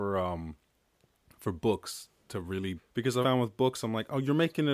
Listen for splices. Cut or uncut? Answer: cut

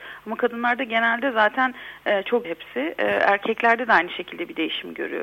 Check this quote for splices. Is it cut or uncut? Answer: cut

